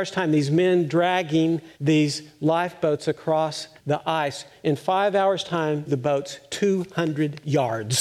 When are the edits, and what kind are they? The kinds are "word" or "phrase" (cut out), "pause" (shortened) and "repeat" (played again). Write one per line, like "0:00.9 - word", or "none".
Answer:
0:01.7 - pause
0:03.8 - pause
0:05.9 - phrase